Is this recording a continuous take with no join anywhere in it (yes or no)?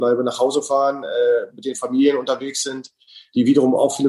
yes